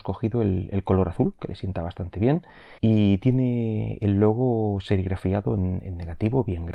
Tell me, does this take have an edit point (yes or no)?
yes